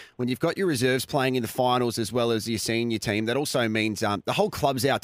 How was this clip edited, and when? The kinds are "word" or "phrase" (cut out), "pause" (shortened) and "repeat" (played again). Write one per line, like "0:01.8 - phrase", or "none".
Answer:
none